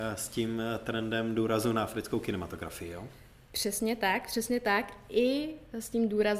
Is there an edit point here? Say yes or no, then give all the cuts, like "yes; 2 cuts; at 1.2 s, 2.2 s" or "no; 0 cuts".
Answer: no; 0 cuts